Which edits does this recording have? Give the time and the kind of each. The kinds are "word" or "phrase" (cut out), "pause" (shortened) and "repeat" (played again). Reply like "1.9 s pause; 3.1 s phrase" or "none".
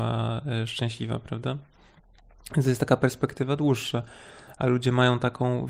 none